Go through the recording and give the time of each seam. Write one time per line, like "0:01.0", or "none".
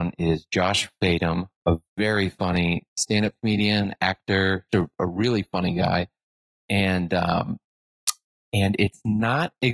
0:04.7